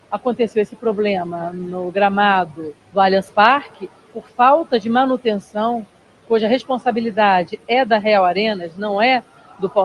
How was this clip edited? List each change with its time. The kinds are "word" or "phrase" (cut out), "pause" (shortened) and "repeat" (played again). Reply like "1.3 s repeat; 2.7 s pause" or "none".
2.8 s pause